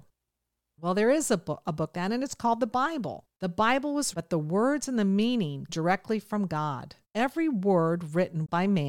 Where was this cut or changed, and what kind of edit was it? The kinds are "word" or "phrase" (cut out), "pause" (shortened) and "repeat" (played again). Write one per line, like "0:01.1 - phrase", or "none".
0:01.9 - word
0:03.3 - pause
0:04.1 - word
0:05.7 - word
0:07.0 - pause